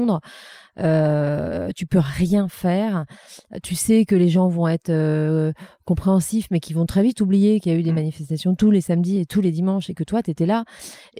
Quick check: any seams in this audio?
no; 0 cuts

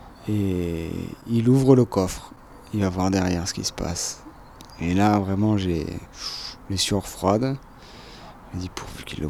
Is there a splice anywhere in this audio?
no; 0 cuts

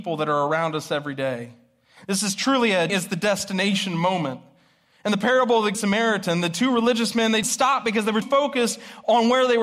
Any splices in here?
yes; 4 cuts; at 2.9 s, 5.7 s, 7.4 s, 8.2 s

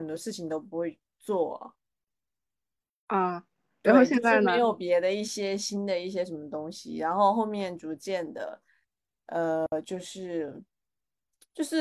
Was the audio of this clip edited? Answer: no; 0 cuts

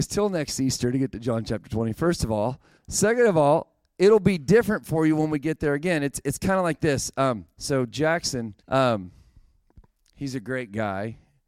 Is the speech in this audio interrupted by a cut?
yes; 2 cuts; at 2.8 s, 8.6 s

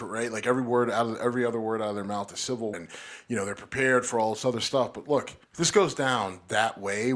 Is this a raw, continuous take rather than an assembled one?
no; 2 cuts; at 2.7 s, 5.4 s

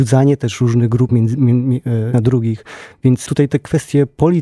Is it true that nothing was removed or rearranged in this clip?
no; 3 cuts; at 1.1 s, 2.1 s, 3.3 s

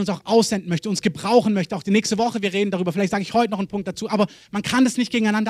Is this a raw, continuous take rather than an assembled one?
yes; 0 cuts

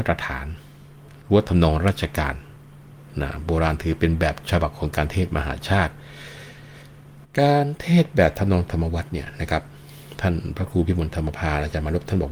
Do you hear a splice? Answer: no; 0 cuts

